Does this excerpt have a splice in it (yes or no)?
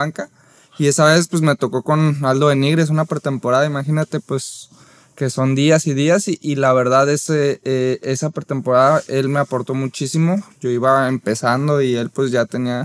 no